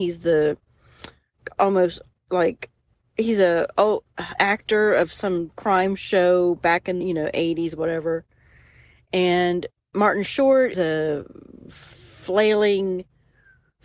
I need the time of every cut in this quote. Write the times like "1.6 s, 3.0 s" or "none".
4.4 s, 7.0 s, 10.7 s